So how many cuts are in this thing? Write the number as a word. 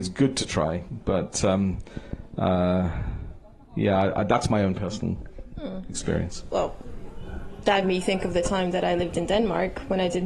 one